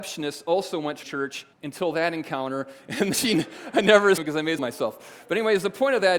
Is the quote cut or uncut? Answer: cut